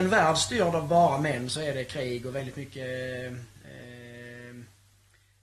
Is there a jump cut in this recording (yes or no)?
no